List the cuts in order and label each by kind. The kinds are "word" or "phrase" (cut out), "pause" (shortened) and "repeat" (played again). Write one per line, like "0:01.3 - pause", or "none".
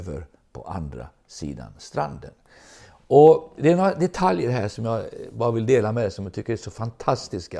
none